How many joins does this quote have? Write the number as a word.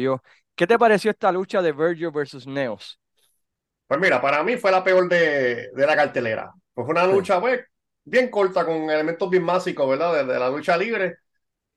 zero